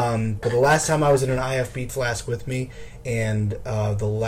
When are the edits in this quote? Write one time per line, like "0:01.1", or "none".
0:01.9